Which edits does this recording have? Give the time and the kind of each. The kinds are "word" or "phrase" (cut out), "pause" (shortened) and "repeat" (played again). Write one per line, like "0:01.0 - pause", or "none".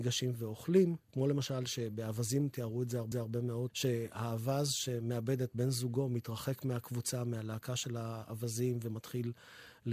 0:01.0 - pause
0:03.1 - repeat